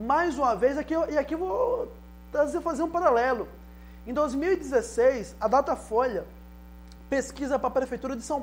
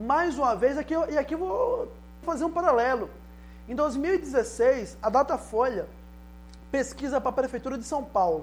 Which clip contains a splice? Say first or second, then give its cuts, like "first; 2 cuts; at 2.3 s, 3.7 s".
second; 1 cut; at 2.2 s